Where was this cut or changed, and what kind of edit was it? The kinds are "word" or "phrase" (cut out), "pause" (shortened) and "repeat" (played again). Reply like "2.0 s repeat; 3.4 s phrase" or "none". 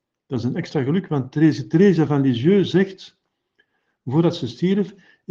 none